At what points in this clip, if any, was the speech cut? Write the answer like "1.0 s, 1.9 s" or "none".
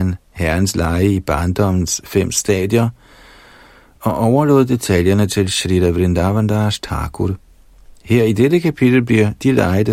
none